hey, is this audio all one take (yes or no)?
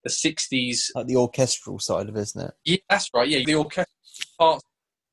no